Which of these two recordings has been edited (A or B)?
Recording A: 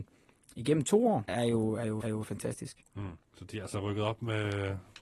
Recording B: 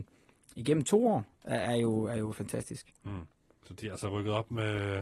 A